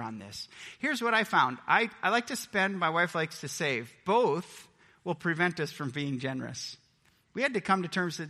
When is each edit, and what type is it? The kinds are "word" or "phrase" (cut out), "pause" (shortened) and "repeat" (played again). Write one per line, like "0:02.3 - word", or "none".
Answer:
none